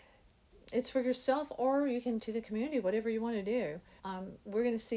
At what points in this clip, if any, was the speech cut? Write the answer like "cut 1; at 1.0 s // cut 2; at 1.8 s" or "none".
cut 1; at 2.2 s // cut 2; at 4.0 s